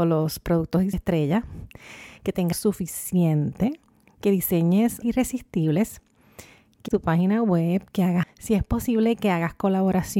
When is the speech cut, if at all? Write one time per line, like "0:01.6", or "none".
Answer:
0:00.9
0:02.5
0:05.0
0:06.9
0:08.2